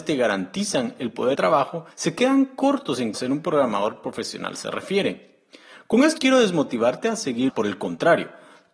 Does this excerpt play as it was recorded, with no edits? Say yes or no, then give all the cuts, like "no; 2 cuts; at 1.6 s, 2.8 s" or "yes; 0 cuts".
no; 5 cuts; at 1.3 s, 1.9 s, 3.1 s, 6.2 s, 7.5 s